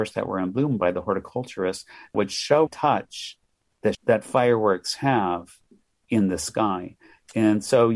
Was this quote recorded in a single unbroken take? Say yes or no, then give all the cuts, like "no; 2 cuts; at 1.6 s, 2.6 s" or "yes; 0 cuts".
no; 3 cuts; at 2.1 s, 2.7 s, 3.9 s